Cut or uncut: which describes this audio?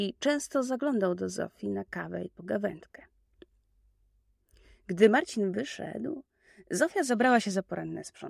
uncut